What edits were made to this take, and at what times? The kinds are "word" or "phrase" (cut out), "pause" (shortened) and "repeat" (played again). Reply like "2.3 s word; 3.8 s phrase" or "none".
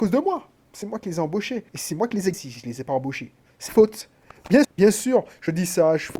1.7 s pause; 2.3 s word; 3.7 s word; 4.6 s word